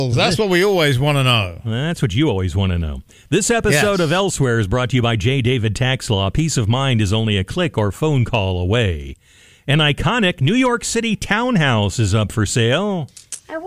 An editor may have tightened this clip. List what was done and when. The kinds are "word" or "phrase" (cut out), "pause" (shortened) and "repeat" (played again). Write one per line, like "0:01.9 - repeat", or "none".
none

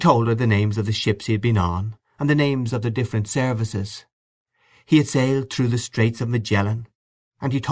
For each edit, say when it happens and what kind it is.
none

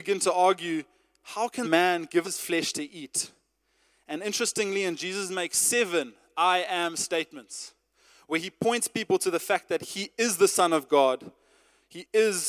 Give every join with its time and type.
0:01.6 - word
0:02.2 - word
0:05.0 - word

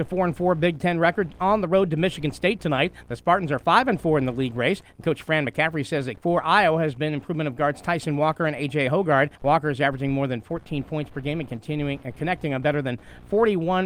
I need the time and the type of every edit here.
0:06.2 - word
0:09.4 - pause

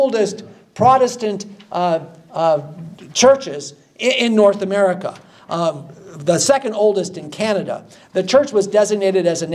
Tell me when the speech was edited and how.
none

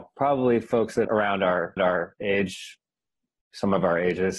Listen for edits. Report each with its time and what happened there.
0:01.0 - word
0:01.8 - repeat

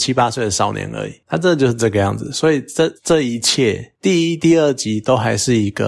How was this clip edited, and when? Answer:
0:03.0 - pause

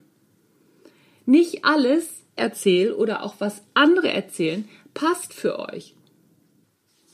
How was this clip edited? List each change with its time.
0:02.4 - phrase

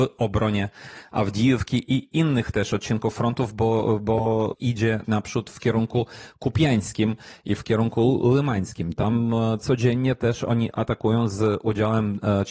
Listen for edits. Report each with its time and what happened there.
0:04.5 - phrase
0:05.0 - phrase
0:07.6 - word

